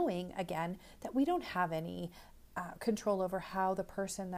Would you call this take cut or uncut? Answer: uncut